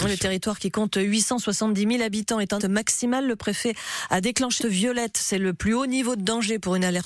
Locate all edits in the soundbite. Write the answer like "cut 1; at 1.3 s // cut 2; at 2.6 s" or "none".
cut 1; at 2.6 s // cut 2; at 4.6 s